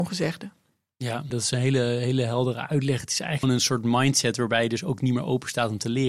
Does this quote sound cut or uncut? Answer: cut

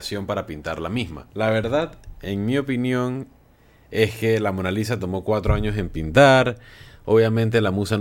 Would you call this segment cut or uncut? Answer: cut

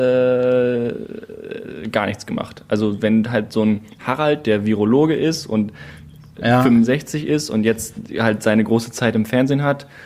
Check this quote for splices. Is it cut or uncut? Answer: uncut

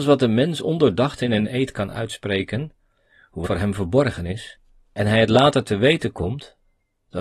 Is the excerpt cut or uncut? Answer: cut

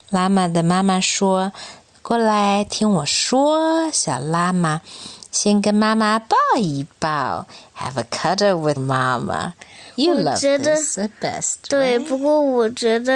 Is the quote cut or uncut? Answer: cut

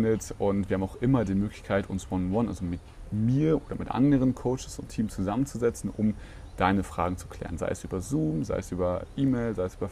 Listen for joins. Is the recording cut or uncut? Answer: cut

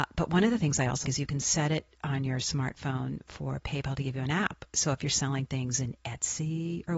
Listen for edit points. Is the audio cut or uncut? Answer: cut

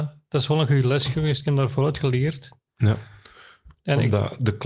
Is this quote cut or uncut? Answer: uncut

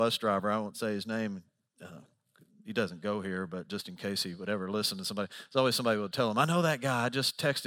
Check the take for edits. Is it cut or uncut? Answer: uncut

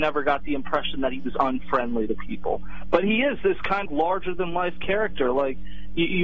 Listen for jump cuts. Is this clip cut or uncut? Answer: cut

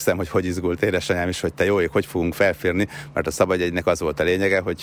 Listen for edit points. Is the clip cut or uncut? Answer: uncut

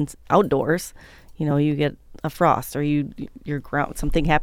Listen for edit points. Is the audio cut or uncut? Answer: uncut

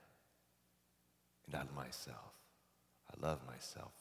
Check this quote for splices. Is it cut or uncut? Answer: cut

